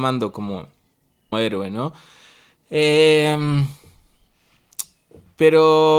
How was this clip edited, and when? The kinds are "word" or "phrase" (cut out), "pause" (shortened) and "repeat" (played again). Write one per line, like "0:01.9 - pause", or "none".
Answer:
0:01.3 - word